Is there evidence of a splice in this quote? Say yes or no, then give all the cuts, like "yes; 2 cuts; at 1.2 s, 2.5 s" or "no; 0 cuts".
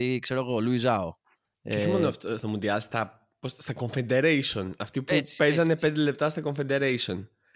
yes; 1 cut; at 1.4 s